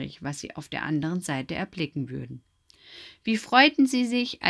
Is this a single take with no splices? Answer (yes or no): yes